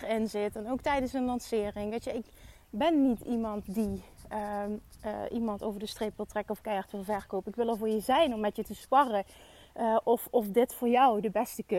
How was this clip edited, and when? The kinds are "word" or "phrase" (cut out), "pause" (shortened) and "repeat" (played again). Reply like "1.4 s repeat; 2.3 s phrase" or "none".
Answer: none